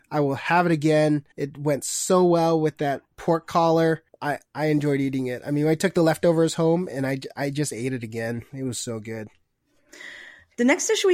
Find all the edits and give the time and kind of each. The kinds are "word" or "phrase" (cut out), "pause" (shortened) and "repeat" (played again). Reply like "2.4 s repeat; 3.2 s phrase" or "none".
1.3 s pause; 3.1 s pause; 4.1 s pause